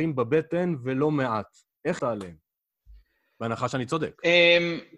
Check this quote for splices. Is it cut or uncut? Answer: cut